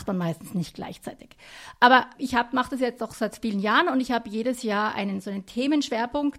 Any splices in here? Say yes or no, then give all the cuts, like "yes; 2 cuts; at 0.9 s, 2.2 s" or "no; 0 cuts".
yes; 1 cut; at 2.1 s